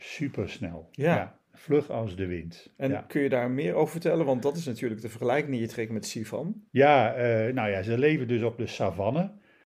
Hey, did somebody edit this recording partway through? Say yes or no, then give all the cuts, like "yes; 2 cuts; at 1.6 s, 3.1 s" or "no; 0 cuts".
yes; 1 cut; at 6.7 s